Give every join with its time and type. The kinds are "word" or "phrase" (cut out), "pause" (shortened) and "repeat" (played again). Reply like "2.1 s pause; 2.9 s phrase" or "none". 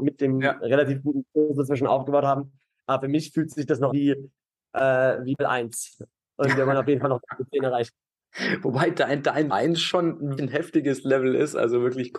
3.9 s word; 5.4 s word; 9.5 s word; 10.4 s word